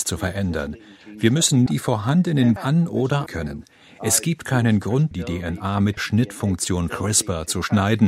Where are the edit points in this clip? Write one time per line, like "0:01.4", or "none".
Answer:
0:01.7
0:02.6
0:03.3
0:05.1
0:06.0
0:06.9